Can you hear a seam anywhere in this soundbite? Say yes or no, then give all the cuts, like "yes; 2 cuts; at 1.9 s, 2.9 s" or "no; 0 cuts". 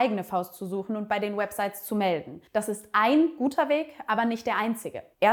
yes; 1 cut; at 2.5 s